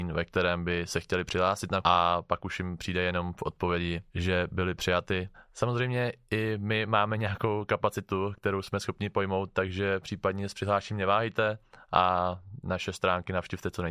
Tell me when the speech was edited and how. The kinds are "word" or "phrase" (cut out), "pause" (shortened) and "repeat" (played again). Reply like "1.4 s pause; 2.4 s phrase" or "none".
1.8 s word; 4.1 s pause; 5.3 s pause